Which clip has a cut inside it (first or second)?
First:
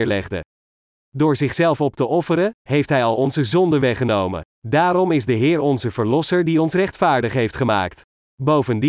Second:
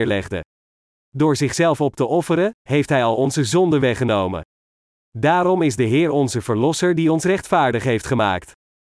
first